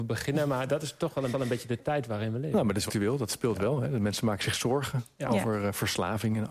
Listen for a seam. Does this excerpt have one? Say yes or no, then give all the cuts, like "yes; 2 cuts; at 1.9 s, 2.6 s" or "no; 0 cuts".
yes; 2 cuts; at 1.3 s, 2.9 s